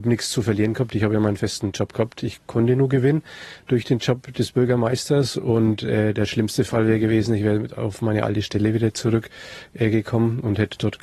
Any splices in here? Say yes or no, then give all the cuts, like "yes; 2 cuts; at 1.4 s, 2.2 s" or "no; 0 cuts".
no; 0 cuts